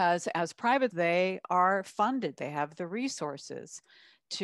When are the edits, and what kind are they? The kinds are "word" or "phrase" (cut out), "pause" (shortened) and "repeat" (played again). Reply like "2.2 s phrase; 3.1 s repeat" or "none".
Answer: 0.9 s word

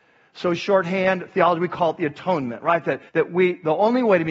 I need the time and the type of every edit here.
3.1 s pause

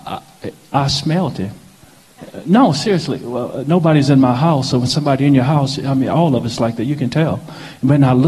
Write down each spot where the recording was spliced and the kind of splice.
none

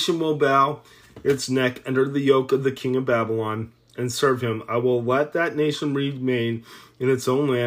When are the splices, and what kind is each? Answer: none

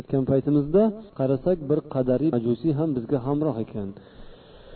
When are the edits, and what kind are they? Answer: 1.1 s pause; 2.3 s word

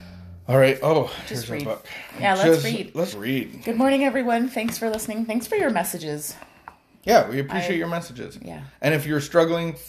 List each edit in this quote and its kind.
3.1 s word

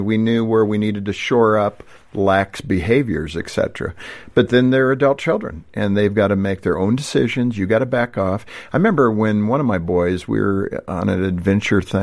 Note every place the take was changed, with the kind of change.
none

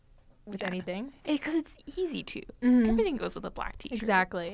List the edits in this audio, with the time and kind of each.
none

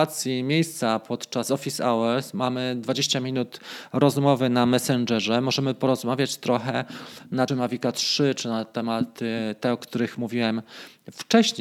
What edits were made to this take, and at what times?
7.5 s phrase

